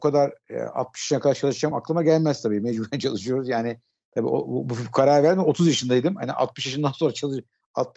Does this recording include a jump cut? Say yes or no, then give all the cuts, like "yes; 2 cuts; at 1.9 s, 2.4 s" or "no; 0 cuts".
no; 0 cuts